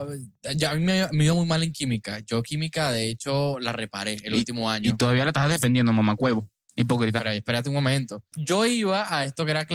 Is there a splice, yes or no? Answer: no